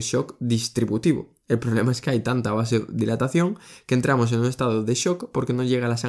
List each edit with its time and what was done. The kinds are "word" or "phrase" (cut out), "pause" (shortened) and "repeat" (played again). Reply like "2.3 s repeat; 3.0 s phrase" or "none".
none